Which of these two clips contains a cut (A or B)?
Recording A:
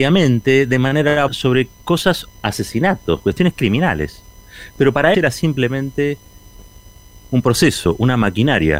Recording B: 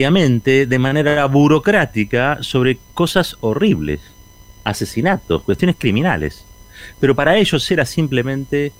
A